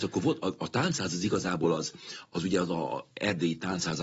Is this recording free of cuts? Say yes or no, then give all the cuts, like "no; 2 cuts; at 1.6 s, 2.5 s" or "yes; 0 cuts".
yes; 0 cuts